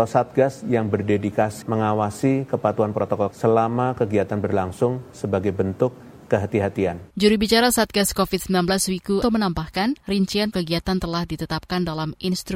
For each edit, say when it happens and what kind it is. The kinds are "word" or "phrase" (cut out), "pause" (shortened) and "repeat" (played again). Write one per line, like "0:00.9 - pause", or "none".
0:01.6 - word
0:03.3 - word
0:07.1 - pause
0:09.2 - phrase
0:10.5 - word

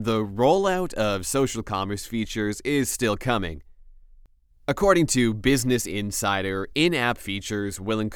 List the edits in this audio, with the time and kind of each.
none

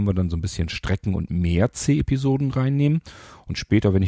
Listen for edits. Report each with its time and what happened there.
none

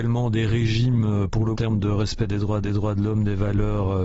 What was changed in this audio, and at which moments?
0:01.5 - phrase
0:02.6 - repeat

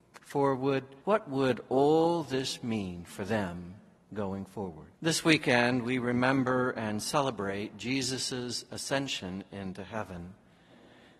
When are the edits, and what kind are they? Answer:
0:01.0 - pause
0:04.0 - pause
0:05.0 - pause

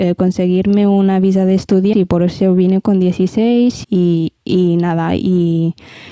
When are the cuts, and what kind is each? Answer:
0:01.9 - word
0:03.8 - word
0:04.4 - pause

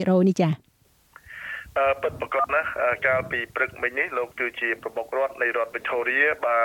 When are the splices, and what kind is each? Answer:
0:04.3 - phrase

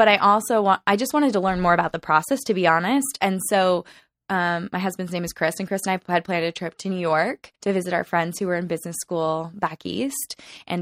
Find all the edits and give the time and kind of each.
0:07.5 - pause

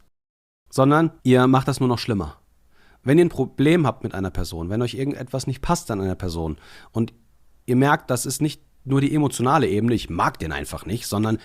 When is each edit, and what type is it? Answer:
none

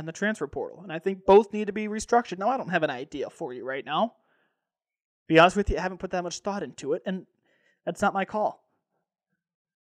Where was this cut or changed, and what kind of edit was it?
none

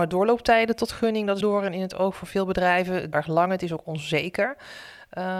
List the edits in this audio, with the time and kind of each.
0:01.4 - word
0:03.1 - phrase

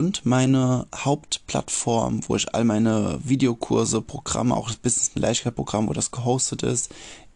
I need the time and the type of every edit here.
none

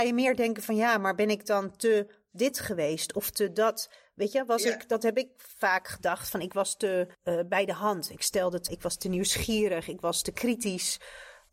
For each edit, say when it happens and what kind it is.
0:07.1 - pause
0:08.7 - phrase

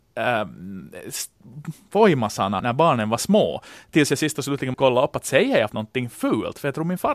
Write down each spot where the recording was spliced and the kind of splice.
0:02.6 - word
0:04.7 - word
0:05.7 - word

